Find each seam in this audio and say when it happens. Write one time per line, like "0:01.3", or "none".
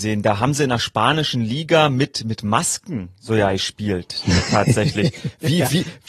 none